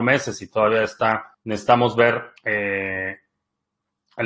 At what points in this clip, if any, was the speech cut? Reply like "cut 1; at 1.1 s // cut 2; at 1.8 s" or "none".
cut 1; at 1.3 s // cut 2; at 2.4 s